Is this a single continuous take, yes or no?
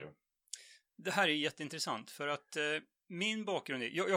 yes